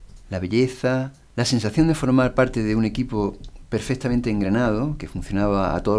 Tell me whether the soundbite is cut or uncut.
uncut